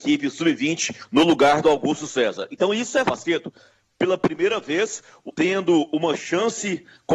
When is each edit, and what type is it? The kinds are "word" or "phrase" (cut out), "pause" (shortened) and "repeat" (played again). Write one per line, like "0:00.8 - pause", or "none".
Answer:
0:03.0 - word
0:05.3 - word

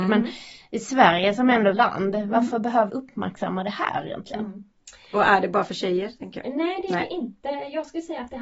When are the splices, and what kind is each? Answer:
0:01.7 - phrase
0:02.9 - word

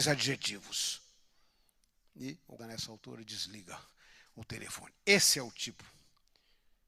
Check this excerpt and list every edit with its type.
0:02.6 - word

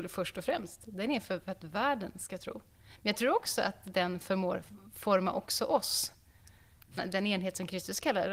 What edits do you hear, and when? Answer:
0:07.0 - word

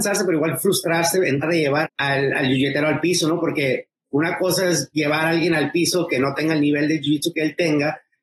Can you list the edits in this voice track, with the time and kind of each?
0:01.4 - word
0:01.8 - word

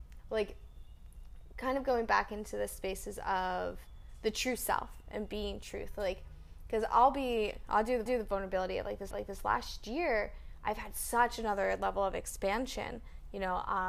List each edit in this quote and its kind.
0:08.1 - repeat
0:09.1 - repeat

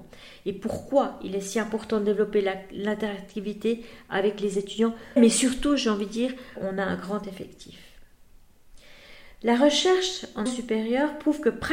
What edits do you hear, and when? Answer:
0:05.2 - word
0:06.6 - word
0:09.3 - pause
0:10.5 - word

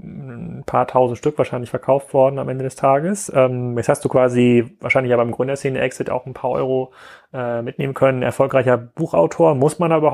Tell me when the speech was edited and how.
none

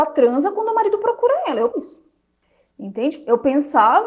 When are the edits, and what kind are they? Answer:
0:01.7 - word
0:02.4 - pause

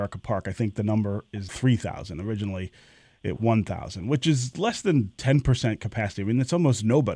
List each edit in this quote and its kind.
0:01.5 - word
0:03.4 - word

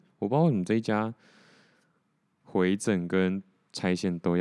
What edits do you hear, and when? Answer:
none

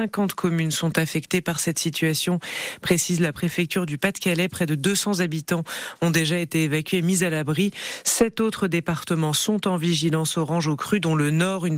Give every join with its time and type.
none

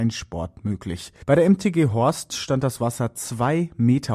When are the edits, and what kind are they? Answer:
0:01.2 - pause

